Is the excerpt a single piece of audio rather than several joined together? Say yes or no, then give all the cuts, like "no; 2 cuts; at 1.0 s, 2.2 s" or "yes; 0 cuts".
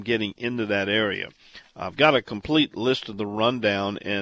yes; 0 cuts